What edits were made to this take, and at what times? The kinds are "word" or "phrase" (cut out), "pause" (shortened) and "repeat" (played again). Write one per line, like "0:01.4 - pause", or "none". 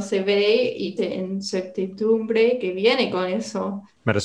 0:01.0 - phrase